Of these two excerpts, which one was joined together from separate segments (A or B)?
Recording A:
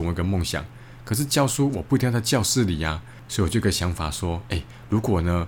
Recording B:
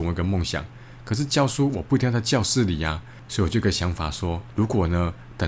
B